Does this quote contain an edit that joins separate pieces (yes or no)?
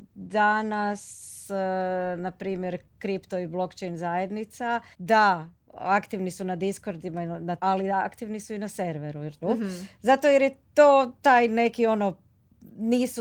yes